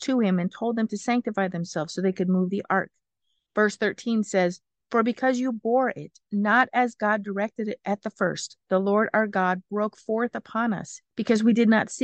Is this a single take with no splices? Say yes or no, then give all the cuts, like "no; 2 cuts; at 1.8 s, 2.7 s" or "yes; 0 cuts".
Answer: yes; 0 cuts